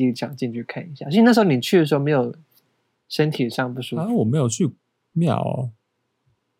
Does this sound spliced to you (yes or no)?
no